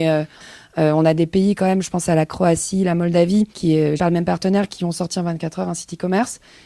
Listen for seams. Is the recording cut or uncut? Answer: cut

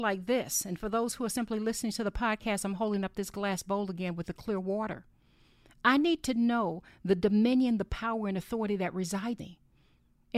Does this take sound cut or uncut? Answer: cut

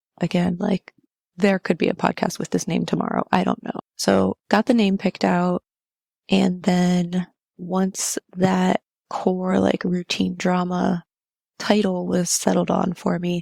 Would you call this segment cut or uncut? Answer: uncut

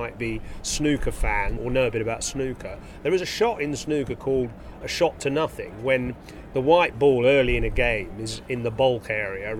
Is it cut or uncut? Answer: cut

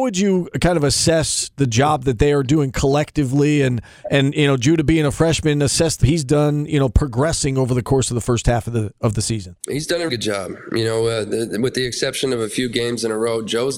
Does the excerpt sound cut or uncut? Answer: cut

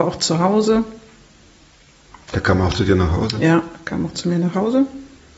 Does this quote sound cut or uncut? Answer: uncut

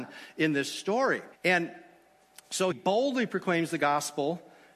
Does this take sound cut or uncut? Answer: cut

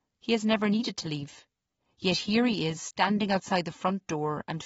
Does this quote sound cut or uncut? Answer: cut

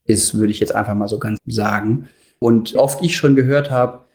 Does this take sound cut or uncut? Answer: cut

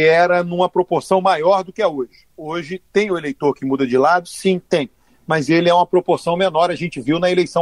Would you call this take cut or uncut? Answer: uncut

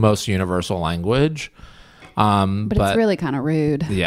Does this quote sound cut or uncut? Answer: uncut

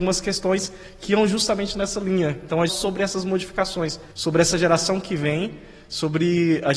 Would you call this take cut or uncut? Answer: cut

